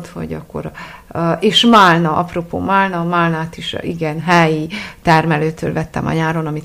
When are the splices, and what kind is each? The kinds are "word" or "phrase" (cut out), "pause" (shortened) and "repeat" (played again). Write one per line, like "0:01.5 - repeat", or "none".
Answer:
none